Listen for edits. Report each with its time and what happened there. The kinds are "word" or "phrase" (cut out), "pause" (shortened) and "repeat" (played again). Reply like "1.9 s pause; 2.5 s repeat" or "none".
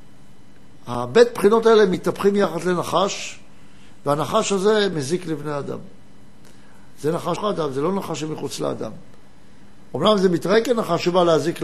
7.4 s word